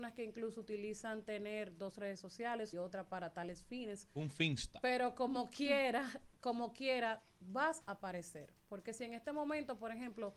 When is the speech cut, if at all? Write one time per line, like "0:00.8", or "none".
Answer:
0:02.7